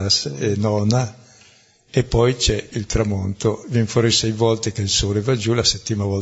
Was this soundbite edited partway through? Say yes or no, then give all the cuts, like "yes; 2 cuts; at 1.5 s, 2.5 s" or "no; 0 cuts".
no; 0 cuts